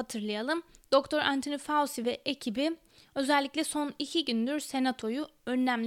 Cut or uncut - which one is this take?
uncut